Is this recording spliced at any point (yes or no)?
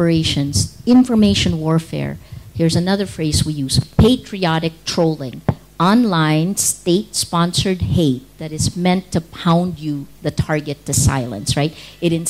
no